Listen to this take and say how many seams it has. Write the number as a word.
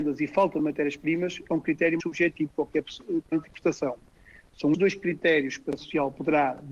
four